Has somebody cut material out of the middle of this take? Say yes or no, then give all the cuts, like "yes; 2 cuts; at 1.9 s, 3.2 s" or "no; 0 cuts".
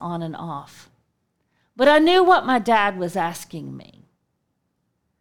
no; 0 cuts